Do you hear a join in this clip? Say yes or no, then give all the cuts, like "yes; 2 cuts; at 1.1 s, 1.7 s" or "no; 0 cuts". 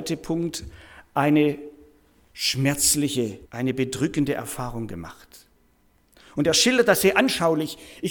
yes; 2 cuts; at 3.4 s, 6.1 s